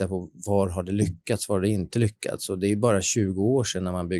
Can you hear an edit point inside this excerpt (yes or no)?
no